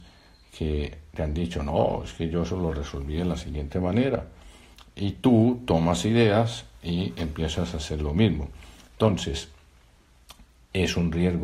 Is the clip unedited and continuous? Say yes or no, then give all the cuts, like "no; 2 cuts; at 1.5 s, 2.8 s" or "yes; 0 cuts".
yes; 0 cuts